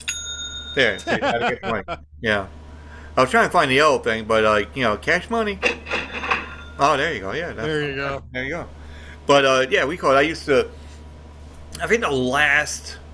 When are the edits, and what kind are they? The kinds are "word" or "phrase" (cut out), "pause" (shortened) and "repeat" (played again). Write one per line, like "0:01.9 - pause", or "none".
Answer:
none